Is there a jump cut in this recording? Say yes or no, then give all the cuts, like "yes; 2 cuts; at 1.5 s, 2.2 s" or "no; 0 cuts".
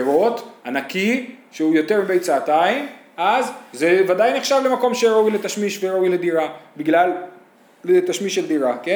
no; 0 cuts